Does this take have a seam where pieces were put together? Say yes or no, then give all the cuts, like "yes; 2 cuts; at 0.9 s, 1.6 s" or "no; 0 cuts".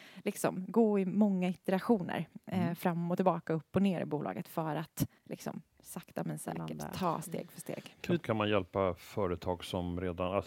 yes; 1 cut; at 5.2 s